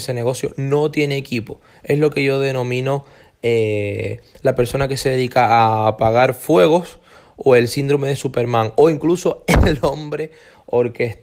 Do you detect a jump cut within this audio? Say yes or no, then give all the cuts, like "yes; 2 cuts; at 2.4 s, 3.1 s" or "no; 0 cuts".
no; 0 cuts